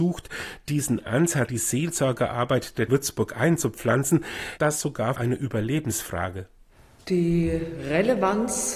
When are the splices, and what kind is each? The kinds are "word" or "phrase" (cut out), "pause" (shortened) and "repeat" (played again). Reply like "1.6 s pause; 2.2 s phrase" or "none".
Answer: 1.5 s word; 2.9 s word; 4.6 s word; 5.1 s word